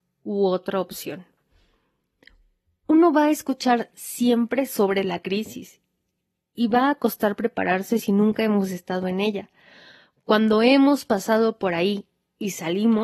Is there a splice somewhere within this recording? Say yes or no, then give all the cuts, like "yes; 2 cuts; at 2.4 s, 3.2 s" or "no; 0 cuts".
no; 0 cuts